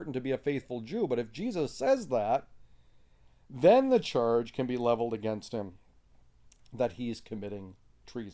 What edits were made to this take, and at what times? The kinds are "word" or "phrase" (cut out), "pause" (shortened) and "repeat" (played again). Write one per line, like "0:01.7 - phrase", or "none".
none